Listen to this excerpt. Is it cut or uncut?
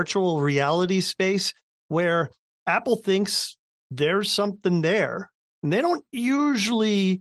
uncut